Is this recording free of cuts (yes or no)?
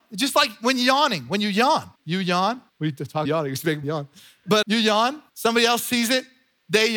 no